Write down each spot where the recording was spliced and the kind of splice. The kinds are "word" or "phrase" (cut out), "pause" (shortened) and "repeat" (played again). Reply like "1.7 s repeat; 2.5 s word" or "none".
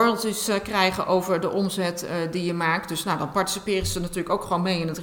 none